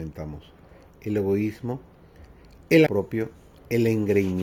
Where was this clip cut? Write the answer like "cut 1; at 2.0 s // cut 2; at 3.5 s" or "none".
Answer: cut 1; at 2.9 s